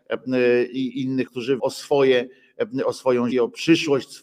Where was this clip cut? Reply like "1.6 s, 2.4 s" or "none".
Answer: 1.3 s, 1.6 s, 3.3 s